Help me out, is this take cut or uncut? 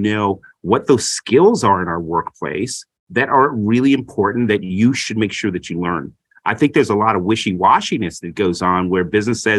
uncut